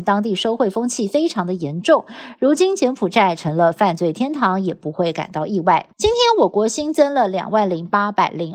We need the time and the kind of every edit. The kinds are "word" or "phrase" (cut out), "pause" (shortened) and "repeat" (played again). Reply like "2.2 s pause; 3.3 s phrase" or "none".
5.9 s pause